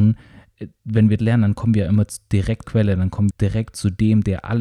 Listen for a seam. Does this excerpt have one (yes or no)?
yes